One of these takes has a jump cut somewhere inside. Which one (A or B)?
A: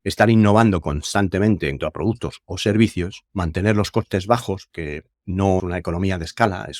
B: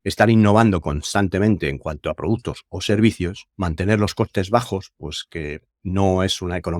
A